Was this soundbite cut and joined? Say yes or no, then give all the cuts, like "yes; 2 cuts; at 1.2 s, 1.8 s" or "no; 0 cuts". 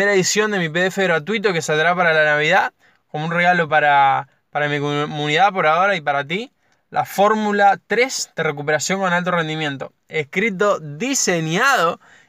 no; 0 cuts